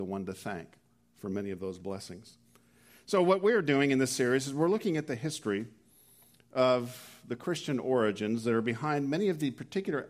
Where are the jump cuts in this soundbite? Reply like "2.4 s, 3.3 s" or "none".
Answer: none